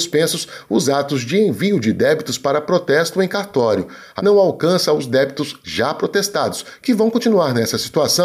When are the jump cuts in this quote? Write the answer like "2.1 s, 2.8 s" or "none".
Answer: 4.2 s